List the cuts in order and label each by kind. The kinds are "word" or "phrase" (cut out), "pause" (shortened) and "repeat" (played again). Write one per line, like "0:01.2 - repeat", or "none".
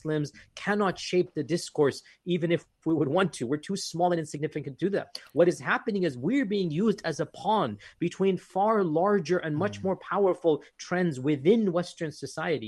0:02.7 - pause